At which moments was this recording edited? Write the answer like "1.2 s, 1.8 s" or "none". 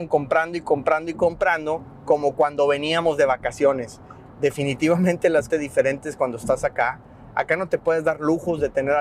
5.5 s